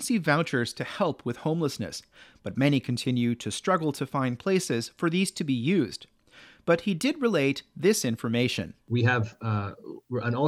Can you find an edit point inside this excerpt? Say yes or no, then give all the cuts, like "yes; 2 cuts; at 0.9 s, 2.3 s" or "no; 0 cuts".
no; 0 cuts